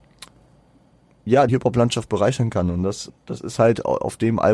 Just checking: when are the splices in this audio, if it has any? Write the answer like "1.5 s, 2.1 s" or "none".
1.5 s, 3.1 s

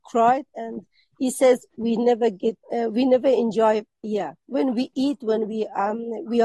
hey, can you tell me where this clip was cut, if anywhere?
2.6 s, 4.4 s

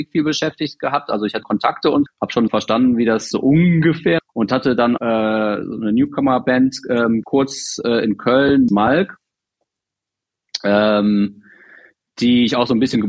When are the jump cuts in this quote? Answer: 1.4 s, 2.1 s, 2.5 s, 3.3 s, 4.2 s, 5.0 s, 7.2 s, 8.7 s

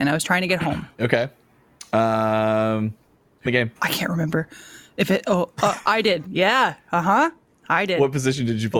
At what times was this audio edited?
0.9 s, 3.5 s, 3.8 s

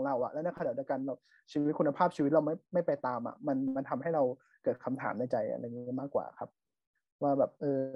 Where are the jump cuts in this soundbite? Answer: none

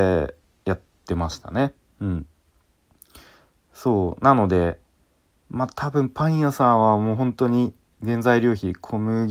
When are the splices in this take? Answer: none

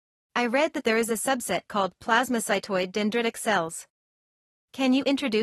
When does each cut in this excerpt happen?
none

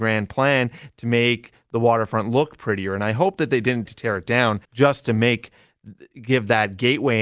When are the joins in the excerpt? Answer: 3.9 s, 4.6 s

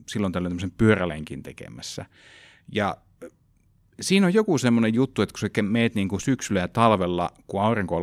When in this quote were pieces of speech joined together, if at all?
none

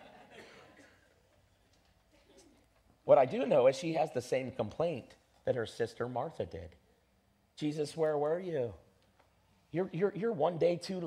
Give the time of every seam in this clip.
none

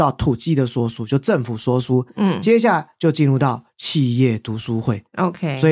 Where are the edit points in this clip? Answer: none

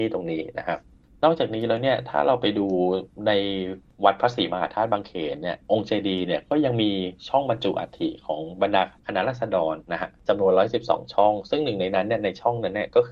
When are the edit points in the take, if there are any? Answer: 5.6 s

